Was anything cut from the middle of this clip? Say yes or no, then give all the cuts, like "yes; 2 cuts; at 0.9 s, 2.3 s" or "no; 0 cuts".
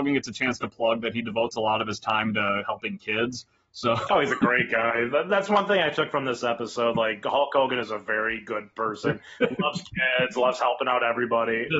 no; 0 cuts